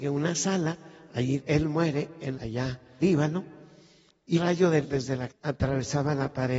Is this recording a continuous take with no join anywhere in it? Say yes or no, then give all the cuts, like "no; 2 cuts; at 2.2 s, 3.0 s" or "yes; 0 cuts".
no; 6 cuts; at 1.4 s, 2.3 s, 3.0 s, 4.3 s, 4.8 s, 5.3 s